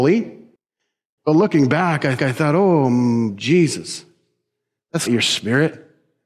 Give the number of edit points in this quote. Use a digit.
2